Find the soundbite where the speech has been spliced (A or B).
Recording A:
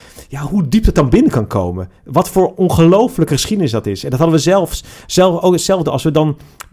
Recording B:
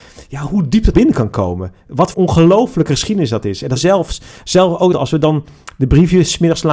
B